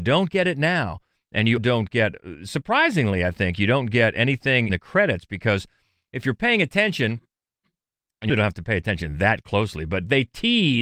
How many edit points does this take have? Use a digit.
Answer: 3